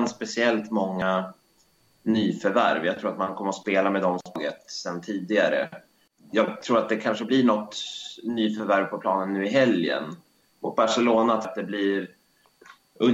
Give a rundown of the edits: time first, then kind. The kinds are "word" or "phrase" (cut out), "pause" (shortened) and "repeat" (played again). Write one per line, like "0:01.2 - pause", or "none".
none